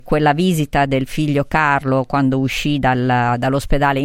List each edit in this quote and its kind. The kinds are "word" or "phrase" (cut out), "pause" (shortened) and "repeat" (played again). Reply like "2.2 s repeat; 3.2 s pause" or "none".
none